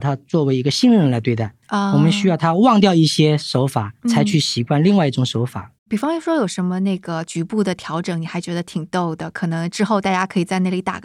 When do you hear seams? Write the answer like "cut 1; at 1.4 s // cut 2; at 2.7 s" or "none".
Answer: cut 1; at 1.6 s // cut 2; at 4.0 s // cut 3; at 5.8 s